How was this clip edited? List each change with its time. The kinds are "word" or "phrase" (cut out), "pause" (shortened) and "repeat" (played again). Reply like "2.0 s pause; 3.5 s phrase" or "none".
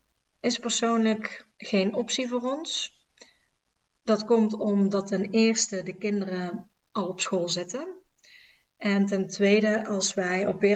1.5 s pause